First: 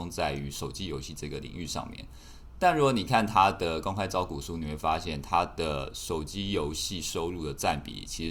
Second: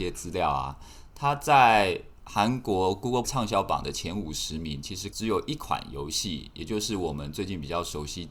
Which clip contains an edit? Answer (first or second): second